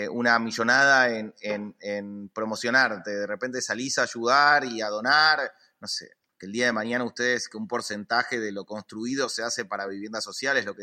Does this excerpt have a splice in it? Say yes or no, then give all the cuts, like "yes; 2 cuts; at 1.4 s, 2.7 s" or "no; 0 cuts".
no; 0 cuts